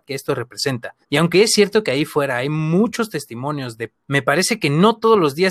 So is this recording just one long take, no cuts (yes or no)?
no